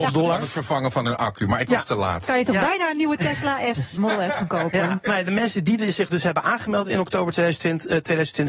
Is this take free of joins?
no; 1 cut; at 4.0 s

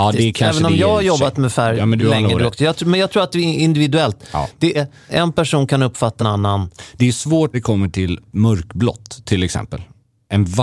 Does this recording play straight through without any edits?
no; 6 cuts; at 2.0 s, 4.7 s, 5.1 s, 6.2 s, 7.5 s, 8.3 s

